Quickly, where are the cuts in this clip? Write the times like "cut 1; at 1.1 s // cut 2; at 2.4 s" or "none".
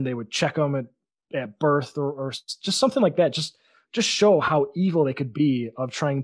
none

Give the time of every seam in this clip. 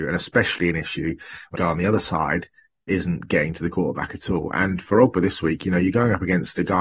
cut 1; at 1.5 s

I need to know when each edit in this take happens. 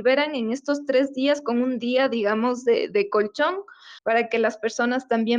cut 1; at 4.0 s

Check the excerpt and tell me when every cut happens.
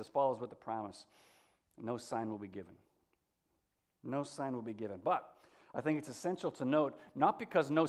none

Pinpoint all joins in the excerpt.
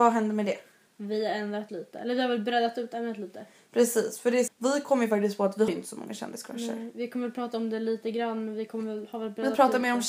cut 1; at 1.7 s // cut 2; at 4.5 s // cut 3; at 5.7 s

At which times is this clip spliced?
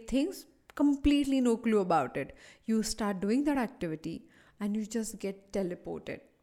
none

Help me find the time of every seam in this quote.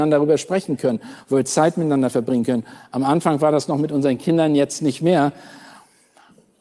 none

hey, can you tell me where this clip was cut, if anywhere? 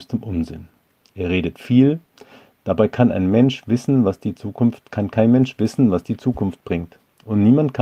none

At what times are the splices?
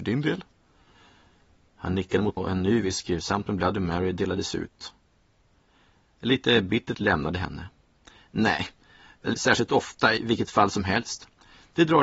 cut 1; at 2.4 s // cut 2; at 6.9 s // cut 3; at 9.3 s // cut 4; at 10.2 s

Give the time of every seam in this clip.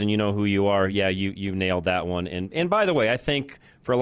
none

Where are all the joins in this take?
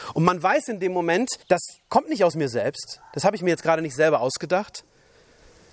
cut 1; at 1.4 s

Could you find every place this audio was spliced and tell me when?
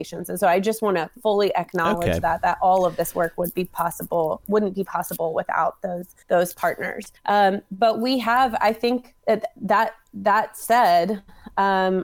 cut 1; at 6.2 s // cut 2; at 7.2 s // cut 3; at 9.2 s

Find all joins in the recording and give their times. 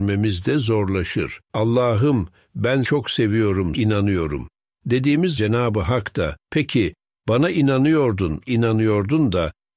cut 1; at 1.4 s // cut 2; at 2.8 s // cut 3; at 3.7 s // cut 4; at 5.4 s // cut 5; at 6.4 s // cut 6; at 8.5 s

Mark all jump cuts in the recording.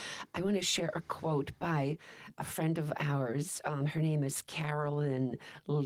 none

